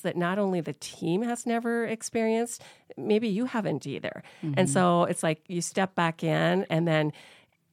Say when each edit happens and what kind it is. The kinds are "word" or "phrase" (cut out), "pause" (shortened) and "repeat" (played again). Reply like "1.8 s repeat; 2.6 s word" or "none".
none